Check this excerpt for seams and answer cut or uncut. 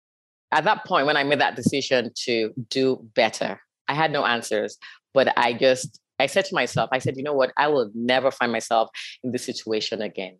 uncut